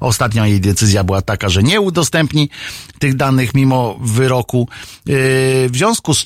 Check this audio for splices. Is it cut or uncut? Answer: uncut